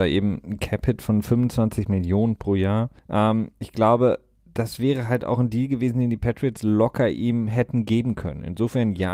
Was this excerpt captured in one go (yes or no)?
no